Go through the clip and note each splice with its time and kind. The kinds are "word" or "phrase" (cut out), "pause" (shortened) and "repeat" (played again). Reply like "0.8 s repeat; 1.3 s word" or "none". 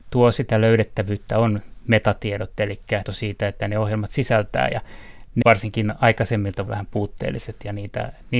3.0 s word; 3.6 s word; 5.4 s word; 6.7 s word